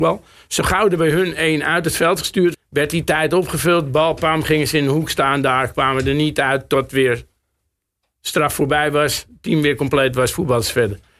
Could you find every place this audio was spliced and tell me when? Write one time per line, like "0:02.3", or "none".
0:02.5